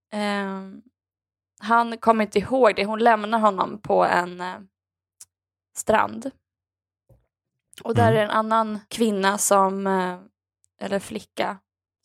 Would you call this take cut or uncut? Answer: cut